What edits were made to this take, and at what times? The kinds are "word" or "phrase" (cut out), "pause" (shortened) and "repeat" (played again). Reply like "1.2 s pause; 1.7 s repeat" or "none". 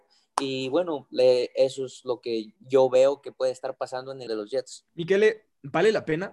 2.6 s pause; 4.3 s word; 4.9 s pause